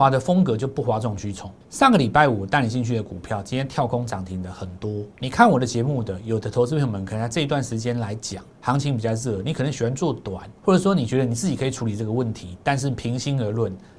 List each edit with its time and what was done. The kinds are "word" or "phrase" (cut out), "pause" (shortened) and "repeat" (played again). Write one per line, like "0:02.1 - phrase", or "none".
0:01.6 - pause
0:05.1 - pause
0:10.6 - pause